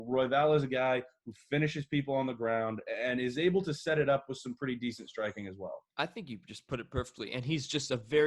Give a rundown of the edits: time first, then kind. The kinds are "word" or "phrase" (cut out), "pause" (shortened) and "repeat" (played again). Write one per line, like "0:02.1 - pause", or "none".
0:05.9 - pause